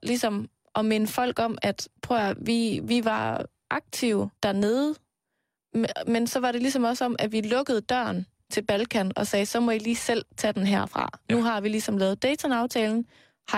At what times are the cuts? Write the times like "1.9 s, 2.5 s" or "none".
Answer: 2.0 s, 4.4 s